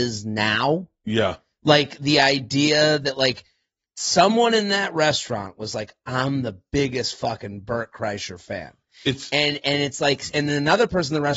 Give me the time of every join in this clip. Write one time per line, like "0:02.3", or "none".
none

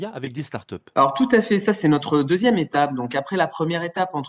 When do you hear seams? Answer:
none

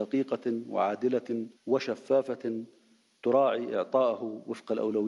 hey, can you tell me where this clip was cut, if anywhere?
0:01.6

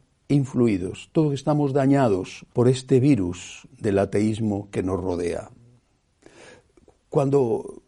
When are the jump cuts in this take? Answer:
0:02.5

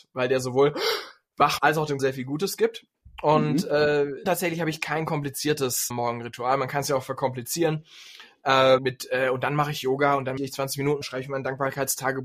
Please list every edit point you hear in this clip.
0:01.6
0:02.0
0:04.3
0:05.9
0:08.8
0:10.4
0:11.0

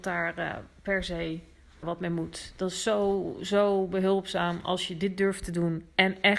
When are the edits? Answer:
0:01.8

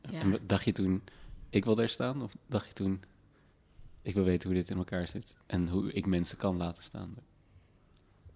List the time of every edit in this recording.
0:05.4

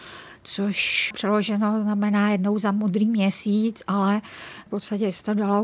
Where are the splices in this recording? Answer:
none

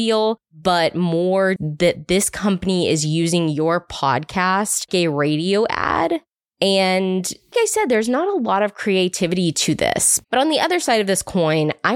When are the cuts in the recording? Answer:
0:01.6
0:04.9
0:07.5
0:10.2

